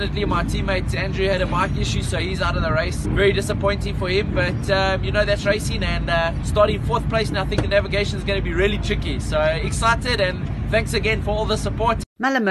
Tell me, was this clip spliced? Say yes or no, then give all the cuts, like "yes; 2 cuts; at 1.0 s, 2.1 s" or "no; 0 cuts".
no; 0 cuts